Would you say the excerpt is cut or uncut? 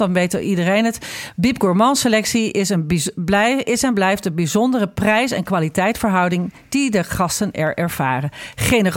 uncut